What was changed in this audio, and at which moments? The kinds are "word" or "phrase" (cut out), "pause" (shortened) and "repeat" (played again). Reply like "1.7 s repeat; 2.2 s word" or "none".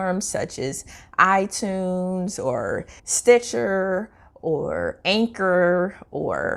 3.0 s pause